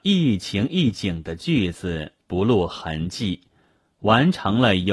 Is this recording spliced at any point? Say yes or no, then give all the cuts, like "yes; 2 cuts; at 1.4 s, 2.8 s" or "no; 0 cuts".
yes; 1 cut; at 2.2 s